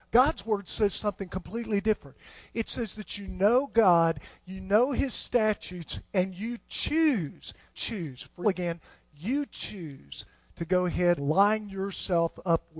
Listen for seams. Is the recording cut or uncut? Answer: cut